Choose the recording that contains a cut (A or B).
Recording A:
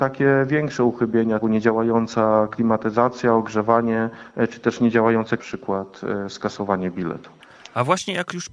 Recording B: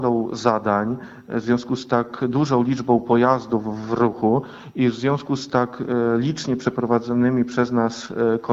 A